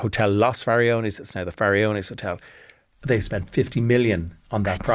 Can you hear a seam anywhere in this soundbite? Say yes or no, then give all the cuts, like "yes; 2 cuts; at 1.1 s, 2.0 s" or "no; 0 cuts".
no; 0 cuts